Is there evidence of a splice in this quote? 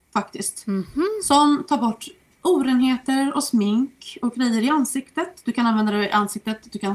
no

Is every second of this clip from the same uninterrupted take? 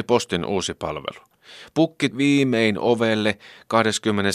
no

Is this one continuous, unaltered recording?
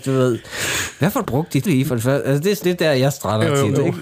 no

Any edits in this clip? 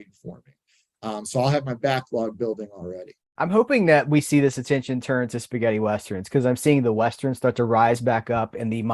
yes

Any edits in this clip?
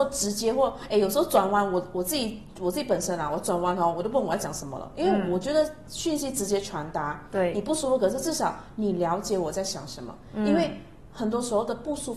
no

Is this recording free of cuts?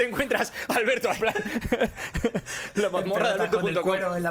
no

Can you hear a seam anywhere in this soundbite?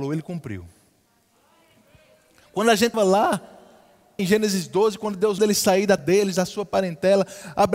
yes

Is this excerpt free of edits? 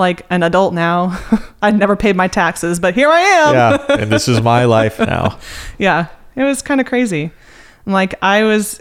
yes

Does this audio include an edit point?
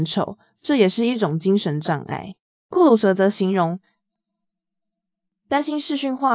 yes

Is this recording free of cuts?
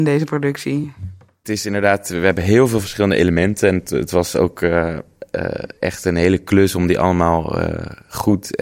yes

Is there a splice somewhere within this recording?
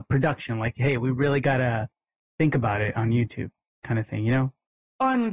no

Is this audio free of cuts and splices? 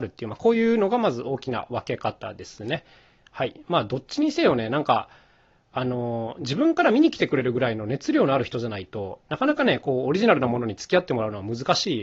yes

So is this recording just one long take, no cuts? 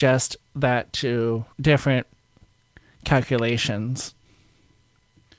no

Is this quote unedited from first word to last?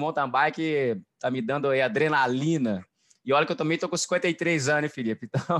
yes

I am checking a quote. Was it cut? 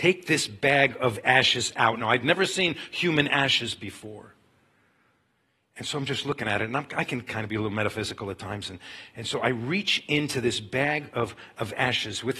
no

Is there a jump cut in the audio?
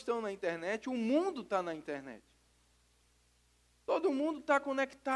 no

